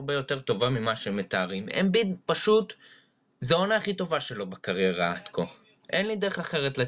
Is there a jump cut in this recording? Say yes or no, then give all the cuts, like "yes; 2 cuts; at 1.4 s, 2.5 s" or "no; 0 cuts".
no; 0 cuts